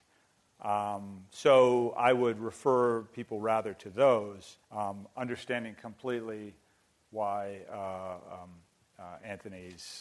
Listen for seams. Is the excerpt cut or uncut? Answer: cut